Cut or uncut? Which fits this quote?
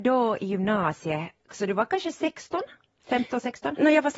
uncut